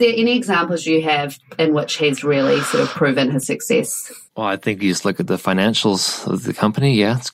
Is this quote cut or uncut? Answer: cut